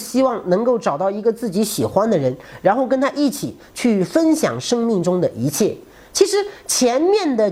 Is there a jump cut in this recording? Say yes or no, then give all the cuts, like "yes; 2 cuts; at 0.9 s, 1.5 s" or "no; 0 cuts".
no; 0 cuts